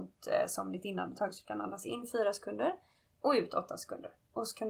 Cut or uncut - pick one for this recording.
uncut